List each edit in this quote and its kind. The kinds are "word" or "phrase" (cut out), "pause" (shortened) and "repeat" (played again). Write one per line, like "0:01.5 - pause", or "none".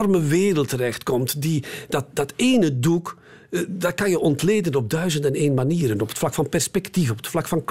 none